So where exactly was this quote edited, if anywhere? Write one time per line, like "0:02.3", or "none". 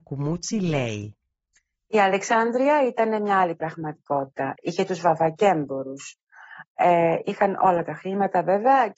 none

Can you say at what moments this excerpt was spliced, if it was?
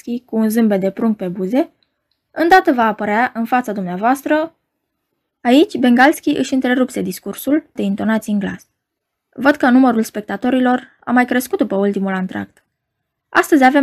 0:07.8

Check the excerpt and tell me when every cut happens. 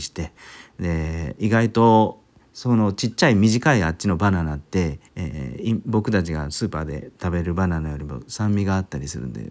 0:02.3
0:05.1

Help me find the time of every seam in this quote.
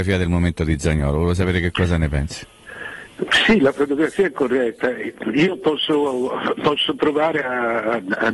none

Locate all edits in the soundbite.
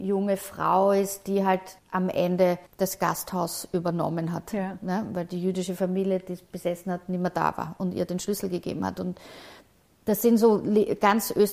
0:01.8
0:02.7

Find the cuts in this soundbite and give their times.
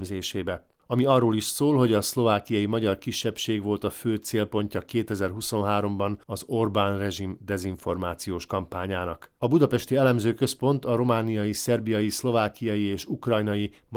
0:06.2
0:09.4

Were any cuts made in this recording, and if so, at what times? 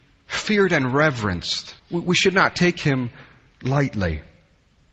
0:01.8

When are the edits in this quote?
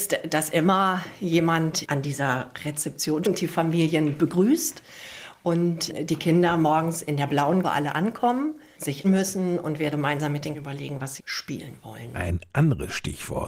0:03.2
0:07.6
0:09.0
0:09.9
0:10.5
0:11.2

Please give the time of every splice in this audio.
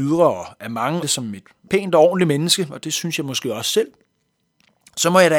0:01.0
0:01.7

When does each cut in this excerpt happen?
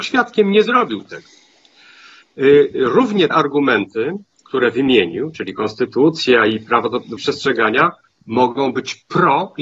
0:03.3
0:07.2

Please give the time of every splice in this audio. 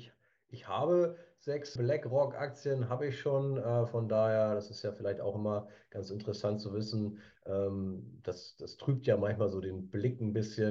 0:01.8

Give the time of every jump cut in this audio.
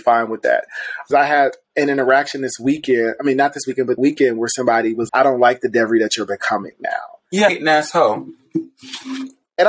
0:01.1
0:04.0
0:05.1
0:07.5

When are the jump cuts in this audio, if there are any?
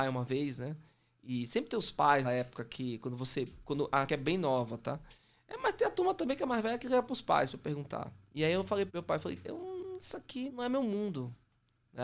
0:02.2
0:04.1
0:08.9
0:09.4
0:10.5

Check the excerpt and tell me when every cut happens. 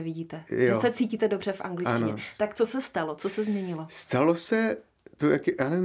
none

